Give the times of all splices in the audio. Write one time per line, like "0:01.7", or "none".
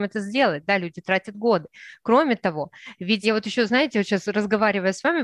0:03.2